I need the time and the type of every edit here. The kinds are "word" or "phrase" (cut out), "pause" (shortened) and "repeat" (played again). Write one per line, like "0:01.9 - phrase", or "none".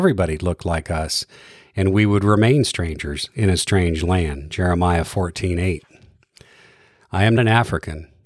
0:07.4 - word